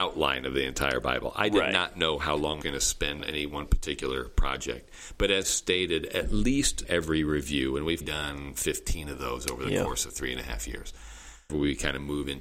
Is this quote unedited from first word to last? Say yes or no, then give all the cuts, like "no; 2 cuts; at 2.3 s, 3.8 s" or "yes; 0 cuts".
no; 6 cuts; at 2.6 s, 3.2 s, 5.4 s, 6.8 s, 8.0 s, 11.5 s